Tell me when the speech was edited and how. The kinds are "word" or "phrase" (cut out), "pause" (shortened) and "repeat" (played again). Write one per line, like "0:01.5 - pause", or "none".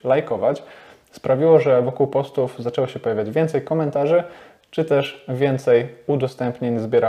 none